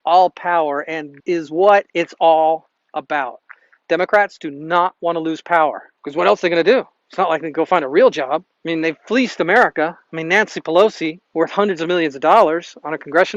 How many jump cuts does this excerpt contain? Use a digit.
5